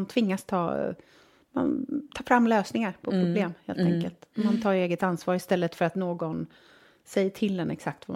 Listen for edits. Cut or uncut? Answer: uncut